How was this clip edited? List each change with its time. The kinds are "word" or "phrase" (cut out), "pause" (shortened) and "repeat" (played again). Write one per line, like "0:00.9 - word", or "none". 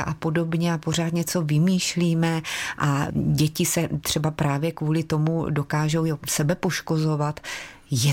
none